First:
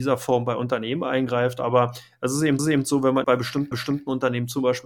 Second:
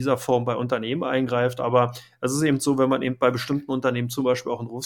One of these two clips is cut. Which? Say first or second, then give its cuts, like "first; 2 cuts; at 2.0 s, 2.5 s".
first; 3 cuts; at 2.6 s, 3.2 s, 3.7 s